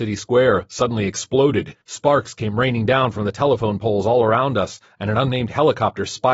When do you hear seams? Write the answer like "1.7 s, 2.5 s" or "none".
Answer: 1.8 s